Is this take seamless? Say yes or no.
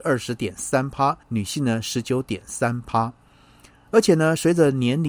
no